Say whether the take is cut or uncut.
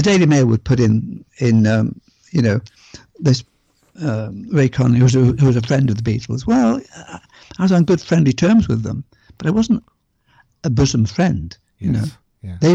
uncut